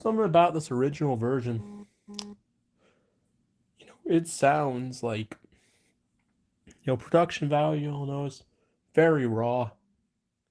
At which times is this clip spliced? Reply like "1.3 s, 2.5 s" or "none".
none